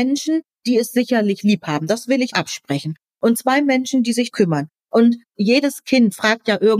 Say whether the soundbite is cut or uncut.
cut